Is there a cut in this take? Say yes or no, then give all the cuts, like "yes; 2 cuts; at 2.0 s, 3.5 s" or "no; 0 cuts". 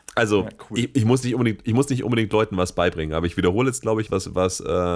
yes; 1 cut; at 4.1 s